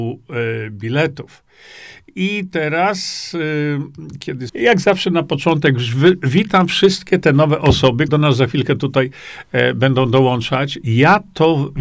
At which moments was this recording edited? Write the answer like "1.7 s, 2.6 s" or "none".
4.5 s, 8.1 s